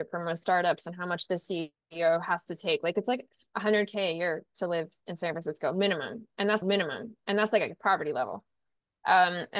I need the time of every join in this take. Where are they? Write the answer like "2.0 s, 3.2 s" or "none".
6.6 s